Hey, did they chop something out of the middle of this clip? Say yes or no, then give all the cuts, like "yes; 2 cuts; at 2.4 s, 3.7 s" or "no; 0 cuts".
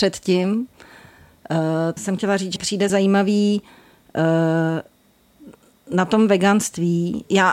yes; 3 cuts; at 2.0 s, 2.6 s, 2.9 s